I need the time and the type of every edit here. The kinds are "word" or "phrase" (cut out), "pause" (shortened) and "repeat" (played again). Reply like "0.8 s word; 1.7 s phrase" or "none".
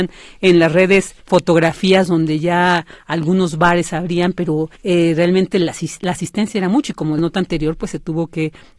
1.2 s pause; 4.8 s pause; 7.2 s phrase